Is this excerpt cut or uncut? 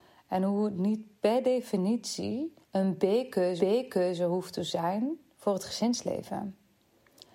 cut